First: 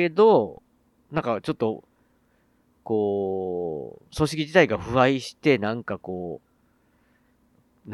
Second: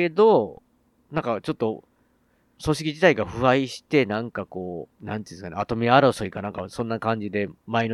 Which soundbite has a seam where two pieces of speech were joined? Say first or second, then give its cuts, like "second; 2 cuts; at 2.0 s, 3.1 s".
second; 2 cuts; at 2.6 s, 4.9 s